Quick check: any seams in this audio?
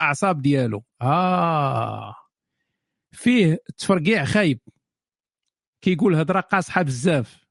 no; 0 cuts

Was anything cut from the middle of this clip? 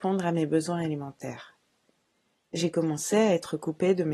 no; 0 cuts

